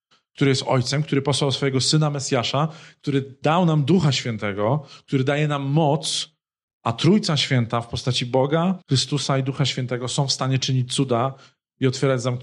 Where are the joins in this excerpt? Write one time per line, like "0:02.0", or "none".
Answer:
0:08.8

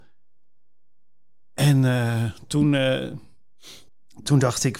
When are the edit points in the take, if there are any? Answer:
0:03.9

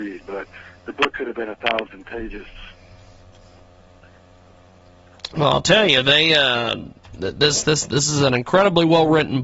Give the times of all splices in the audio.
none

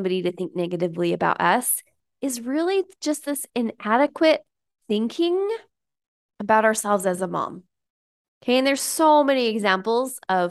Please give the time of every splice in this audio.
none

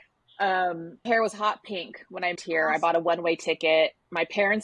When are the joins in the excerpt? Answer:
0:01.1
0:02.4

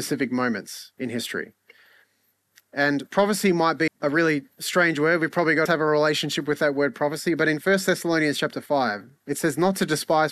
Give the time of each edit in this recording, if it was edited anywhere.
0:00.9
0:03.9
0:05.7

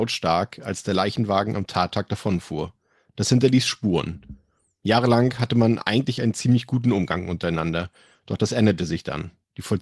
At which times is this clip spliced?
none

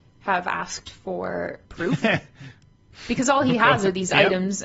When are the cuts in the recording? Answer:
0:01.7

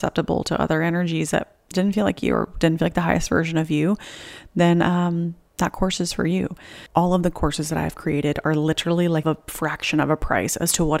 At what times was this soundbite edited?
0:06.9

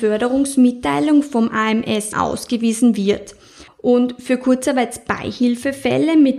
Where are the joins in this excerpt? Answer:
0:02.1
0:03.7

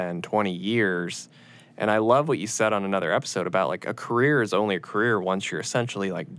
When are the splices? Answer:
none

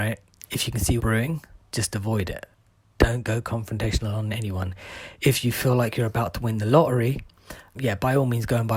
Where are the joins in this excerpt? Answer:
0:01.0
0:07.8

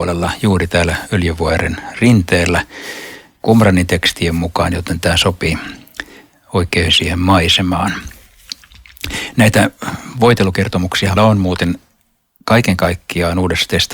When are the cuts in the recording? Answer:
0:06.9
0:11.2

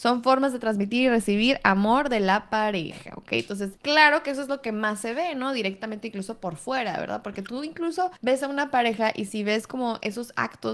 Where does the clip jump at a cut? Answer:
0:03.8
0:08.2

